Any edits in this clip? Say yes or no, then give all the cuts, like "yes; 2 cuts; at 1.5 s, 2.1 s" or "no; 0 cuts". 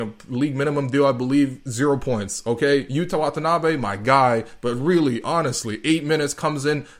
no; 0 cuts